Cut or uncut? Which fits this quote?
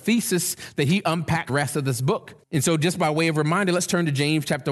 cut